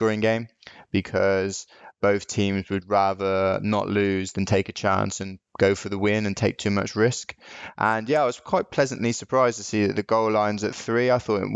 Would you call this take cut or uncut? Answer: uncut